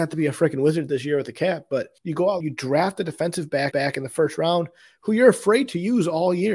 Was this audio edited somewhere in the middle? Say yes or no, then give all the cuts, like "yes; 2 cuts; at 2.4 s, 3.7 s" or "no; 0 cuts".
yes; 3 cuts; at 2.0 s, 2.4 s, 3.7 s